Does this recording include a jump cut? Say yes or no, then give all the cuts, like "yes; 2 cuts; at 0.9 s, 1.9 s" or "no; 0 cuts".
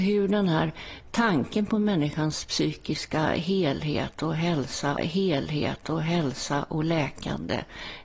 yes; 1 cut; at 5.0 s